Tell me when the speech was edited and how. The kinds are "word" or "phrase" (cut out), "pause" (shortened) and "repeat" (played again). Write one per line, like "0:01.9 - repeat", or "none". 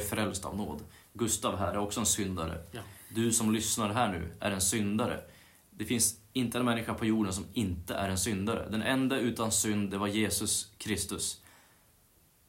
none